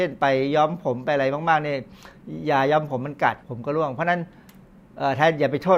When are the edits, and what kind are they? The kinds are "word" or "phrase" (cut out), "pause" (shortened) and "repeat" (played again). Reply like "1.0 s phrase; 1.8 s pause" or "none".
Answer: 3.4 s pause

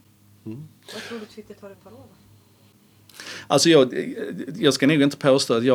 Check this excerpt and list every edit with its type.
1.7 s phrase

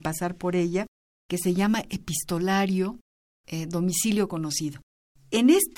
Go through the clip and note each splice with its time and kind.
none

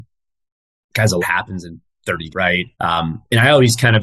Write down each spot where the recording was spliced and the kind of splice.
1.2 s word; 2.3 s word; 2.7 s pause

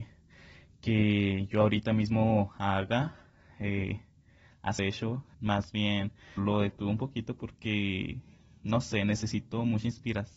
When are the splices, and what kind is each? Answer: 4.8 s phrase; 5.3 s pause; 6.4 s word

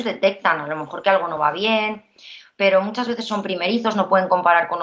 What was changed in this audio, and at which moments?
none

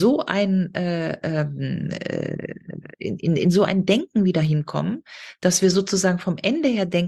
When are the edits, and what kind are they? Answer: none

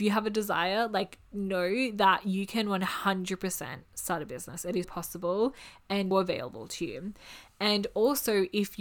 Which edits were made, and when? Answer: 4.8 s word; 6.1 s word

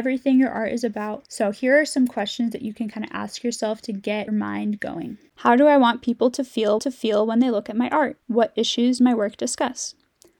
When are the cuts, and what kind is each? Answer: 4.3 s word; 6.8 s repeat; 8.2 s pause; 9.0 s word

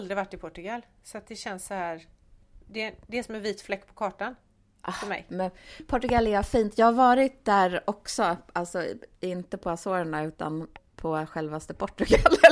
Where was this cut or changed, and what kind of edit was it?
2.6 s pause

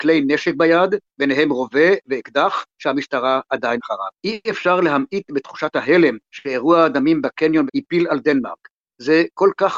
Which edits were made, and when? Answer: 3.8 s word; 4.2 s pause; 6.2 s pause; 7.7 s word

